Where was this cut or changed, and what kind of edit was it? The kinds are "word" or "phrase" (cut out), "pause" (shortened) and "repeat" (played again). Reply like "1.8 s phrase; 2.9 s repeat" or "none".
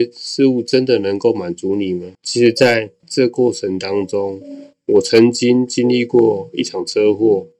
2.1 s pause